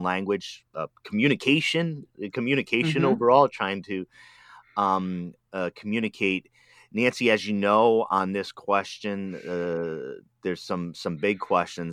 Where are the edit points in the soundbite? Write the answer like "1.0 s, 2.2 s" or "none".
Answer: none